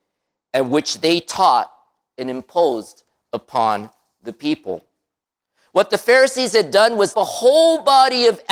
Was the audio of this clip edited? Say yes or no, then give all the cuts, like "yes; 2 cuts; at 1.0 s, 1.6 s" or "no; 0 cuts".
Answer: yes; 1 cut; at 7.1 s